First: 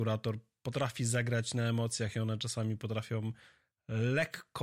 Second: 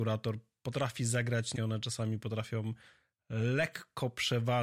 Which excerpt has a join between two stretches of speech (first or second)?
second